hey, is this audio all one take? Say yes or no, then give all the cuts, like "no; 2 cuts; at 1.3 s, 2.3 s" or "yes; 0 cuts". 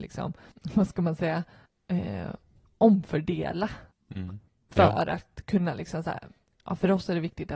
yes; 0 cuts